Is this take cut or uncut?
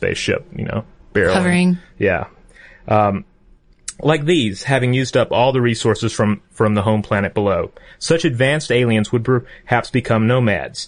uncut